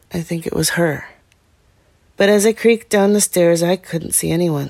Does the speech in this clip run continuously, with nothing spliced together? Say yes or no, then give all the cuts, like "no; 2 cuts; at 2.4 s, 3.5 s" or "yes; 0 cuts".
yes; 0 cuts